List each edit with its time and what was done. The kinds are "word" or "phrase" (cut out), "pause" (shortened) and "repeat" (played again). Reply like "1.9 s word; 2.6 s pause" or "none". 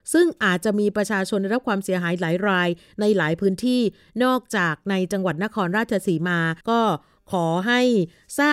6.6 s pause

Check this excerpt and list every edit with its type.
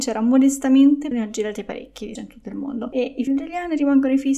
1.1 s word; 2.2 s word; 3.3 s phrase

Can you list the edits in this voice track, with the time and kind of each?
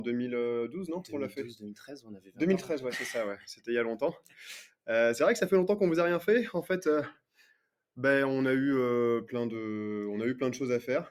none

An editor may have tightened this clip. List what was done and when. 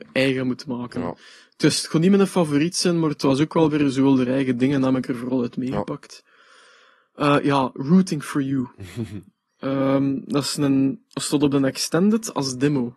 none

